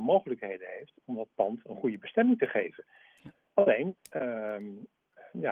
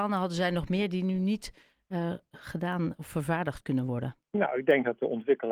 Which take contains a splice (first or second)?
second